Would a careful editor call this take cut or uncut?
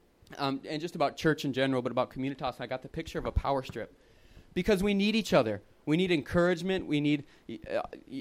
uncut